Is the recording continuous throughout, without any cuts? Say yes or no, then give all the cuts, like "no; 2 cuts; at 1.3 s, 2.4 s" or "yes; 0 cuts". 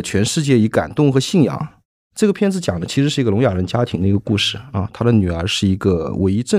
yes; 0 cuts